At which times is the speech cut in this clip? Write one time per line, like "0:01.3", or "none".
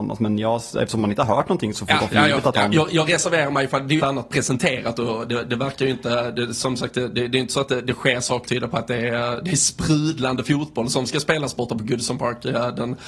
0:01.9
0:04.0
0:08.5